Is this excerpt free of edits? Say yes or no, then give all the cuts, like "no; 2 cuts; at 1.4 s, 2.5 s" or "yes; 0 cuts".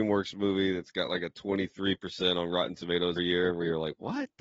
no; 1 cut; at 3.2 s